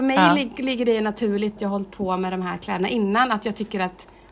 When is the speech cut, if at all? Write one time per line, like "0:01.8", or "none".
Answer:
0:01.6